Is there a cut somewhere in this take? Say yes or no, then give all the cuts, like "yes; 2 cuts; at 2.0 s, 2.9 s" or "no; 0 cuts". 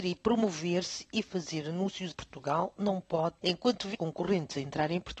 yes; 3 cuts; at 2.1 s, 3.4 s, 3.9 s